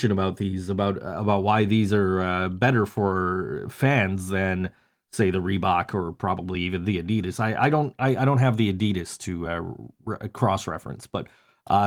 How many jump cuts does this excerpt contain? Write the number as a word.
zero